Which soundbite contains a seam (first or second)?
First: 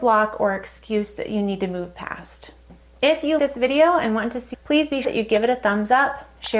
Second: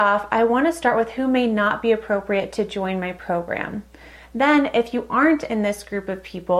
first